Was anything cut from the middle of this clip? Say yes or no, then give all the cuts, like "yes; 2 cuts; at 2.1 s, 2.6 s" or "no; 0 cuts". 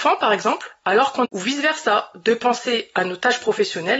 yes; 1 cut; at 1.2 s